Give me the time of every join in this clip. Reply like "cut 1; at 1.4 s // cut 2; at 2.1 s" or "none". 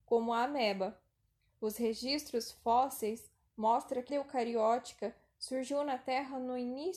cut 1; at 4.1 s

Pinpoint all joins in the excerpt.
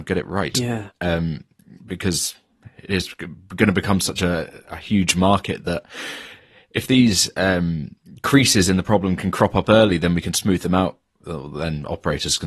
none

